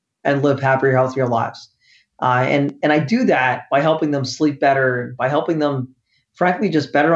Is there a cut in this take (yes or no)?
no